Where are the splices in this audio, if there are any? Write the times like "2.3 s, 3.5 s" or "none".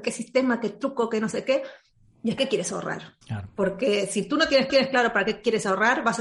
2.4 s, 3.2 s, 4.7 s